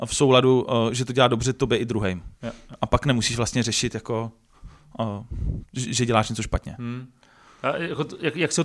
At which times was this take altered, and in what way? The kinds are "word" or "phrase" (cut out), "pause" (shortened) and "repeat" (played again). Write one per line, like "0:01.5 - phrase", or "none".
none

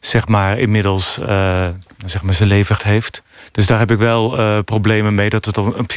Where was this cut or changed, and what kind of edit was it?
0:01.9 - pause
0:02.8 - word
0:03.4 - pause

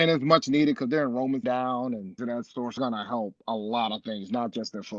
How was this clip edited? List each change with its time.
0:01.4 - word
0:02.2 - word
0:02.8 - phrase

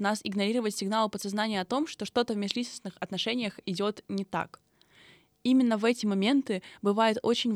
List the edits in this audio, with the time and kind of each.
none

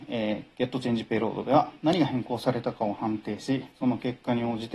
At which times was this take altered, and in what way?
0:03.7 - pause

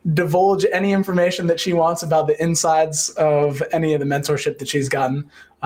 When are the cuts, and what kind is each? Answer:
none

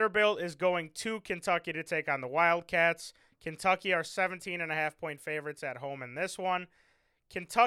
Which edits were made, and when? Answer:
none

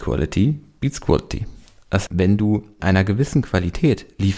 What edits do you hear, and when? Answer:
0:02.1 - word
0:02.8 - word

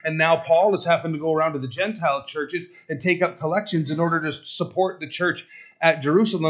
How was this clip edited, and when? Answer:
none

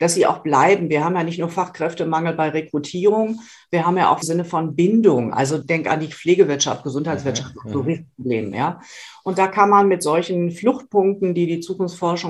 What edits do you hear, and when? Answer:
0:04.2 - phrase
0:05.6 - word

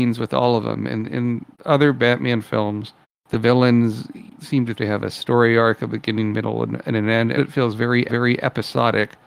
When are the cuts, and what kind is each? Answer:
0:01.5 - word
0:03.0 - pause
0:04.3 - word
0:04.8 - phrase
0:07.4 - word
0:08.1 - repeat

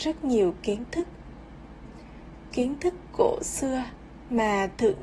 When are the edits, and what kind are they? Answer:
0:02.5 - word

